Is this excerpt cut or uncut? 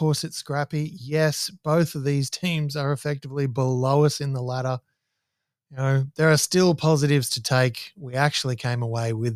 uncut